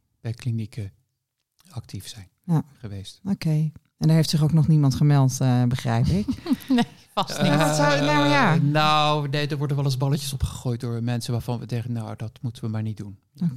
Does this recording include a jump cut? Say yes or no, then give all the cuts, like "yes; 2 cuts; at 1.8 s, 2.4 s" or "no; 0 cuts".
no; 0 cuts